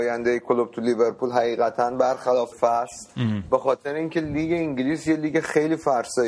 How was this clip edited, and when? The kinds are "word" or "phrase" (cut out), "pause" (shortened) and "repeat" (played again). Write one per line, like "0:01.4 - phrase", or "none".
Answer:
0:02.5 - word